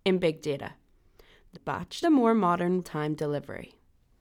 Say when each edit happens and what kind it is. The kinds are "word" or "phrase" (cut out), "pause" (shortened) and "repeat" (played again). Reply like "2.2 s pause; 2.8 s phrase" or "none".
1.5 s phrase; 2.0 s phrase; 2.8 s word